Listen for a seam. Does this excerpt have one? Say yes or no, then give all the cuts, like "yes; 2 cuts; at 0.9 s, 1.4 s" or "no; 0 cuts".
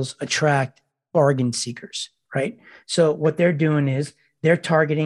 no; 0 cuts